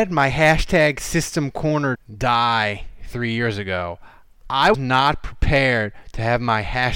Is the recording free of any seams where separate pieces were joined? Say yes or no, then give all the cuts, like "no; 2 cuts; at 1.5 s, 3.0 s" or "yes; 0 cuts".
no; 2 cuts; at 1.9 s, 4.7 s